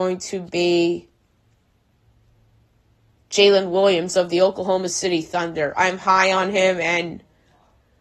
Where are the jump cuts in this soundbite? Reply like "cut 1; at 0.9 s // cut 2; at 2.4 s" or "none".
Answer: none